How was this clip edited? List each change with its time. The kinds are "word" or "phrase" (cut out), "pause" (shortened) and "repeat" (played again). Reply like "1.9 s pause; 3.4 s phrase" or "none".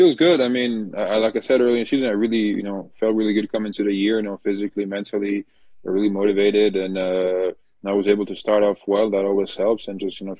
none